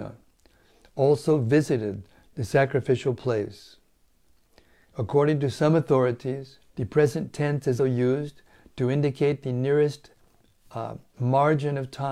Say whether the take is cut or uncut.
cut